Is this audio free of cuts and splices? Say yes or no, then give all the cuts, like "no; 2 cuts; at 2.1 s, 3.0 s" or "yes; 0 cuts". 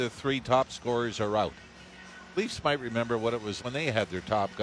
no; 1 cut; at 3.6 s